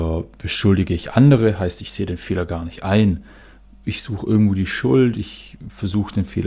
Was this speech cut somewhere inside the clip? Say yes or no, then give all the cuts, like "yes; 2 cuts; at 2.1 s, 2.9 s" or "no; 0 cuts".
no; 0 cuts